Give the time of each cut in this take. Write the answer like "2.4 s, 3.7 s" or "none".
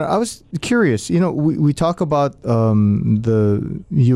none